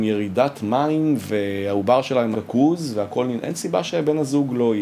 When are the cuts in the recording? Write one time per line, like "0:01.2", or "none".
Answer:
0:02.3